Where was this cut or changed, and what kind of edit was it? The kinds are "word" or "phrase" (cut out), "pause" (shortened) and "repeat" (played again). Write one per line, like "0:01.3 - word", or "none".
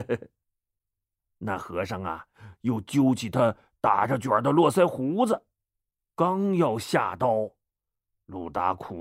none